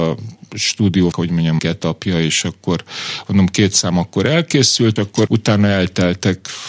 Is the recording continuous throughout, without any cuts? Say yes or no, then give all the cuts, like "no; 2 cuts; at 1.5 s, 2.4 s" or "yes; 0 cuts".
no; 4 cuts; at 1.1 s, 1.6 s, 5.0 s, 5.3 s